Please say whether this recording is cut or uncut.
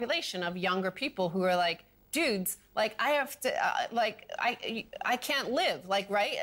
uncut